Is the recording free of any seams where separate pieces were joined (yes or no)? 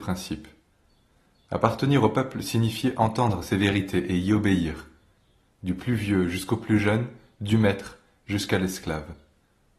yes